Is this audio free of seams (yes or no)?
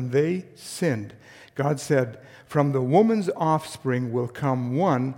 yes